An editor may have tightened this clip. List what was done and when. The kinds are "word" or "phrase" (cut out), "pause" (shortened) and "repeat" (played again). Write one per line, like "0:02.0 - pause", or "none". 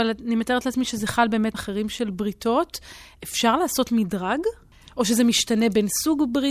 0:01.5 - phrase